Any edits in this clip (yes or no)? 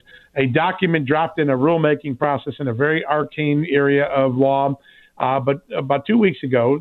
no